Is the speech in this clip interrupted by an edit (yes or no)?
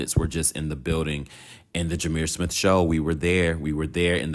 no